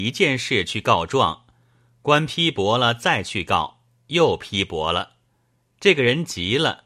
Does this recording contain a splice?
no; 0 cuts

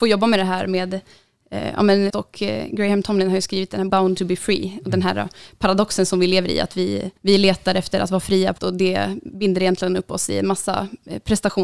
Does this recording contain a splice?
yes; 4 cuts; at 2.1 s, 3.9 s, 7.2 s, 8.6 s

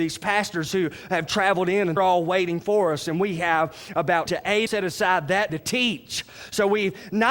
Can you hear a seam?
yes; 4 cuts; at 2.0 s, 4.3 s, 4.7 s, 5.5 s

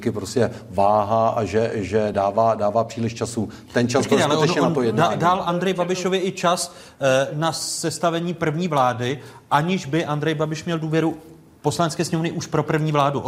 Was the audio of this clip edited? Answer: no; 0 cuts

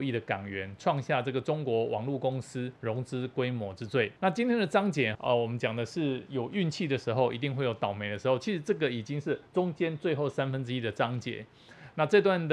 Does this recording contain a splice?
yes; 4 cuts; at 2.8 s, 4.2 s, 5.1 s, 9.5 s

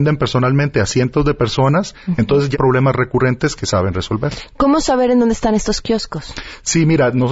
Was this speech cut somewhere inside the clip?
yes; 1 cut; at 2.5 s

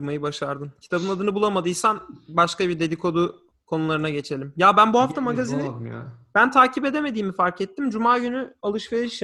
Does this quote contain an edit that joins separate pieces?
no; 0 cuts

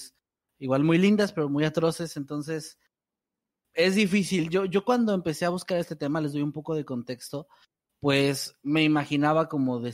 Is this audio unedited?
yes; 0 cuts

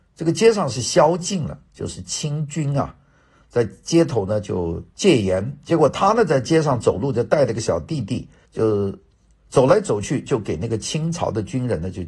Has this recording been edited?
yes; 2 cuts; at 4.9 s, 8.4 s

